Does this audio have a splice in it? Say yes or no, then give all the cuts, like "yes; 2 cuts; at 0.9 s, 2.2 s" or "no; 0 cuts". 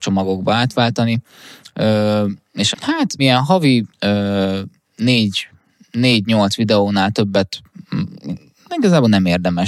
yes; 3 cuts; at 2.7 s, 3.2 s, 3.9 s